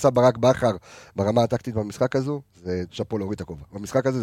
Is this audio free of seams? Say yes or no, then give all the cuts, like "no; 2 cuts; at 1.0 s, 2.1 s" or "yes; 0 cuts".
no; 1 cut; at 2.9 s